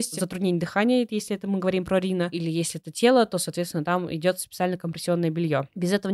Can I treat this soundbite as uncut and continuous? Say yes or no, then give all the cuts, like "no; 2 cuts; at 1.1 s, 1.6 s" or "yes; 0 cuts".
yes; 0 cuts